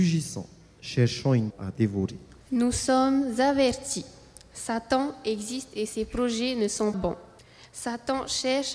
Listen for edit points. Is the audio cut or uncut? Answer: cut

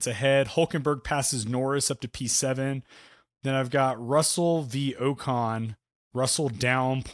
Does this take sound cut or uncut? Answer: uncut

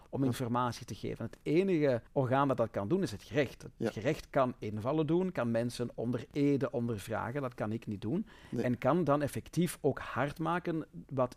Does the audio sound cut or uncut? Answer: cut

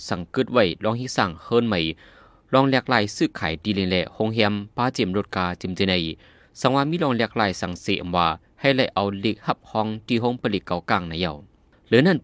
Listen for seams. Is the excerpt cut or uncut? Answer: uncut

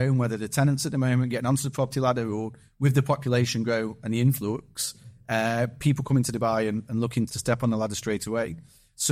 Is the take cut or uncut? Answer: cut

